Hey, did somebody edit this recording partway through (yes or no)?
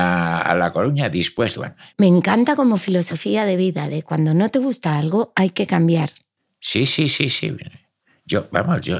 no